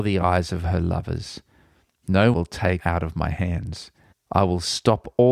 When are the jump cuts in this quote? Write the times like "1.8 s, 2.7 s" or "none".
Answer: 2.3 s, 2.8 s, 4.1 s